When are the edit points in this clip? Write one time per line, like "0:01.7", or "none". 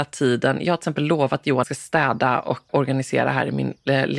0:01.6
0:02.7